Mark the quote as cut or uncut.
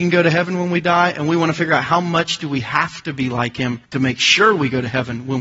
cut